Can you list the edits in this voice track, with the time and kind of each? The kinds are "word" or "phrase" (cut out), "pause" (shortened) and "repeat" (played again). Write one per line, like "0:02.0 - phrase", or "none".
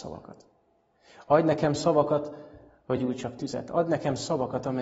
0:03.0 - word